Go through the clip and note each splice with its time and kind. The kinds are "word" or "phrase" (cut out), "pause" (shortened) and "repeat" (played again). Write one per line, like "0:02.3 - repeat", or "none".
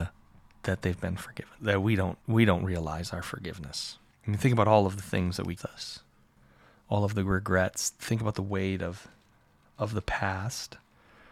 0:01.6 - pause
0:02.2 - pause
0:04.1 - pause
0:05.6 - phrase